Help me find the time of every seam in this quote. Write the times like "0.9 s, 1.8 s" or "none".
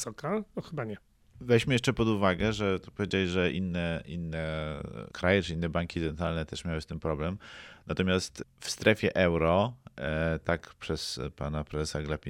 1.2 s, 5.1 s